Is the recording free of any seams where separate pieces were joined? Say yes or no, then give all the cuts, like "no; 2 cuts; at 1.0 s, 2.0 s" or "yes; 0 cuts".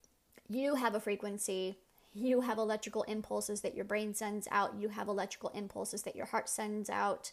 yes; 0 cuts